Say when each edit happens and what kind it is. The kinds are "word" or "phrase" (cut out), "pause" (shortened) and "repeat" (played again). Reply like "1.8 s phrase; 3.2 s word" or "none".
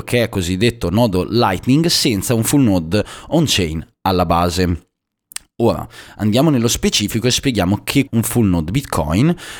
8.1 s word

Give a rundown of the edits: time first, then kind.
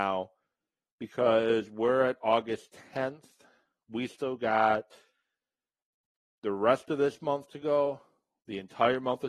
none

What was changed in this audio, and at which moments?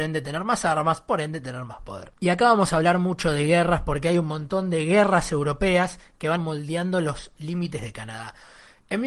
2.2 s pause; 6.4 s phrase; 7.8 s word

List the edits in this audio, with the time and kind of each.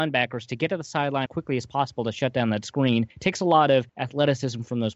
1.3 s word; 3.1 s pause; 3.9 s pause

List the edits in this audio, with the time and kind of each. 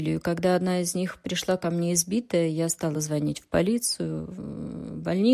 none

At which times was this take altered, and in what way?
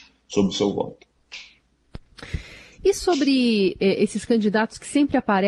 none

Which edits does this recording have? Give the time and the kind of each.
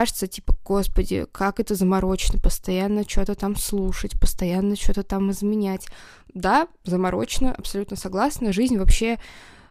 none

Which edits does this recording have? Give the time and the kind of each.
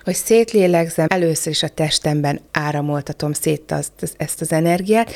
1.1 s word; 2.5 s pause

